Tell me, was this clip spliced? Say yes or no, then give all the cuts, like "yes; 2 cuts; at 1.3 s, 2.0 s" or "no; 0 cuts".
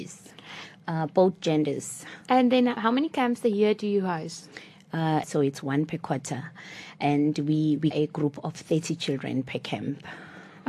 yes; 4 cuts; at 2.2 s, 2.8 s, 5.2 s, 7.9 s